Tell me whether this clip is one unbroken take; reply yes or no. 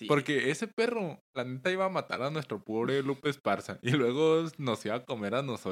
yes